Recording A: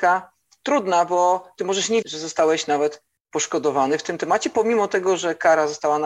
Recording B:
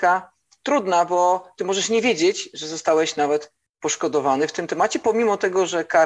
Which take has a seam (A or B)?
A